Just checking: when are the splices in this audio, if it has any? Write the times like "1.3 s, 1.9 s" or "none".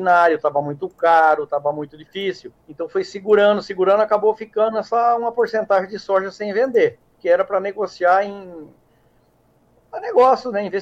2.6 s